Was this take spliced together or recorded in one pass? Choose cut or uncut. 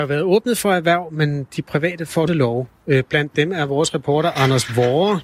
cut